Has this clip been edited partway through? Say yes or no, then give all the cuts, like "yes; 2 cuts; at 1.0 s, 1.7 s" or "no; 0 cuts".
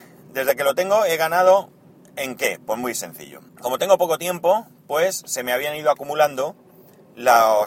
yes; 1 cut; at 3.5 s